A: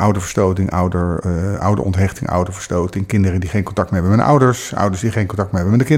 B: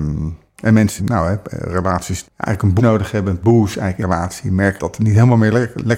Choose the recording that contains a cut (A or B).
B